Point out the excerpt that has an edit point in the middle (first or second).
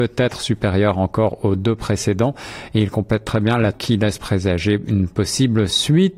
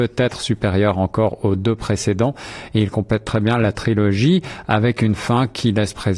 first